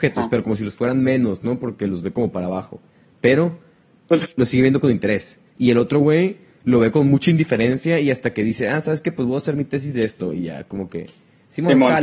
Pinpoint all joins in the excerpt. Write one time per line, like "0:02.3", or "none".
none